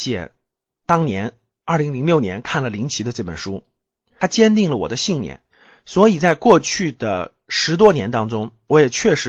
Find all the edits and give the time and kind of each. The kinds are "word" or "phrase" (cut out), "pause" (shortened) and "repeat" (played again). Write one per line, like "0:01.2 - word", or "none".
none